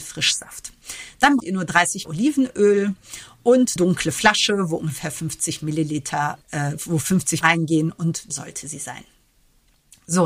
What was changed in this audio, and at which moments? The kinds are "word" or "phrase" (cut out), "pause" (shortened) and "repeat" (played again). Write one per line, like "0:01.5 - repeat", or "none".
0:01.4 - word
0:02.0 - word
0:03.8 - word
0:06.4 - word
0:07.4 - word
0:08.3 - word